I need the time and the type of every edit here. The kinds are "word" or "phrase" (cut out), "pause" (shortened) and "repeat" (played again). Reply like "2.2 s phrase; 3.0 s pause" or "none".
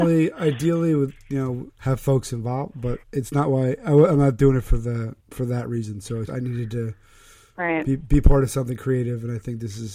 1.7 s phrase; 3.0 s word; 5.2 s pause; 6.3 s word